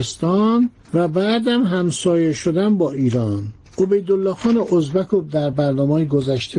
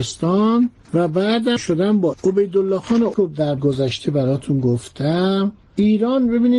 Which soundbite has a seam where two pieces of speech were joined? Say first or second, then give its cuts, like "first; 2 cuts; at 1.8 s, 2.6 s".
second; 4 cuts; at 1.6 s, 2.1 s, 3.1 s, 3.6 s